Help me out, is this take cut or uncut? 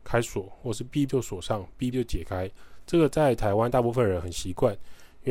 cut